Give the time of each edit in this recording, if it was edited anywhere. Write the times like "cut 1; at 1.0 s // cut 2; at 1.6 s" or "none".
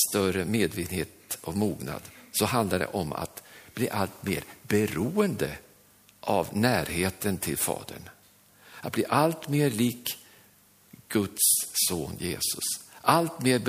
none